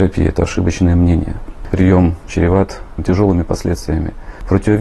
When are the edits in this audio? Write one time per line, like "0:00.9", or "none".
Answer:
0:01.7
0:02.3